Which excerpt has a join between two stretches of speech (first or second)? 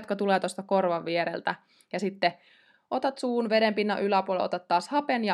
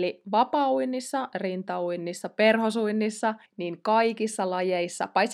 second